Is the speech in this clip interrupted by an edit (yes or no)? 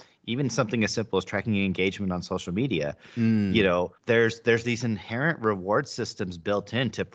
yes